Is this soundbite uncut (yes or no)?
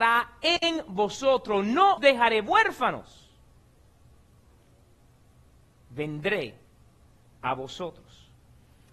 no